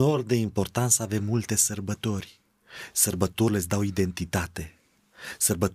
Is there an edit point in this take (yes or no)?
no